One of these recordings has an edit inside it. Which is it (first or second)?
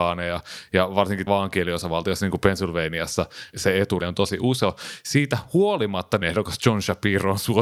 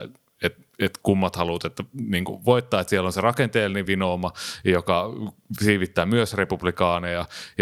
first